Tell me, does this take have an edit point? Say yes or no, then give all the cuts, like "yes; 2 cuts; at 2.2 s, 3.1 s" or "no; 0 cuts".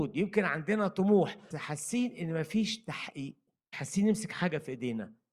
yes; 2 cuts; at 1.5 s, 3.7 s